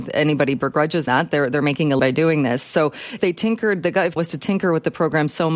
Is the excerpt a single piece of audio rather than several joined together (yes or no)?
no